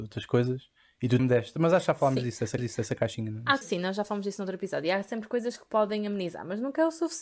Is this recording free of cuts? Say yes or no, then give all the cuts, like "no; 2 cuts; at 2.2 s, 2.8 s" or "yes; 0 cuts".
no; 3 cuts; at 1.2 s, 2.6 s, 3.6 s